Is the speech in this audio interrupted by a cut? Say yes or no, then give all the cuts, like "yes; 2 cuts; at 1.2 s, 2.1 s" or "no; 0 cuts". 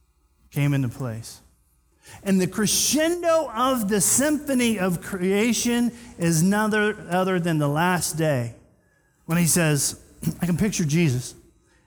no; 0 cuts